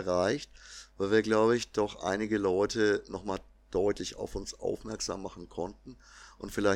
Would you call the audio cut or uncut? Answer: uncut